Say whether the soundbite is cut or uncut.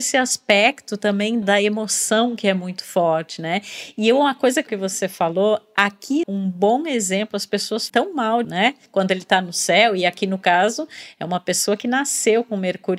cut